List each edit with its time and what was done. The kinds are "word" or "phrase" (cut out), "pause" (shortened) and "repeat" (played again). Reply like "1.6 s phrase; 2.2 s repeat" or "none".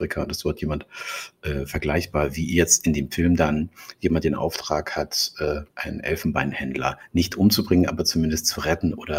5.7 s pause